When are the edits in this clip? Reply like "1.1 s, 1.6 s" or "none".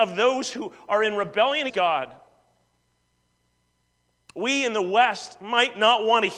1.7 s